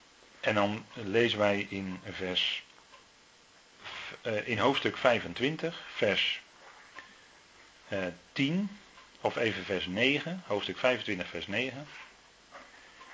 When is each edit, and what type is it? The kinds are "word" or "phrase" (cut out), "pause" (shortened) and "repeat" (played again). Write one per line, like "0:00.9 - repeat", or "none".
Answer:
none